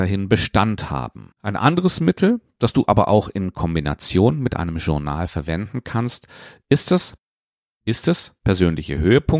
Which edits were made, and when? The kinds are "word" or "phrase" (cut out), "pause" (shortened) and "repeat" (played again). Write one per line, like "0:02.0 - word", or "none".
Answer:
0:01.4 - pause